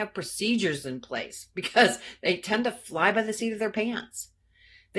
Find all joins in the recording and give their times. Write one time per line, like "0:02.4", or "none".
none